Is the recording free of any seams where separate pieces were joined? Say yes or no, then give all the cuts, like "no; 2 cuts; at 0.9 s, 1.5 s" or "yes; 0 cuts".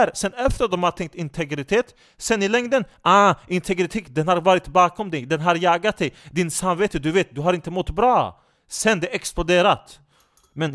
yes; 0 cuts